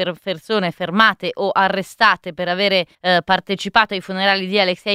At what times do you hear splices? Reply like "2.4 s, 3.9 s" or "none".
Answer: 2.9 s